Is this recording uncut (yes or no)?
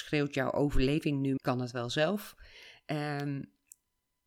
no